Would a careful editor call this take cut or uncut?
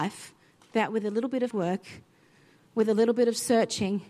cut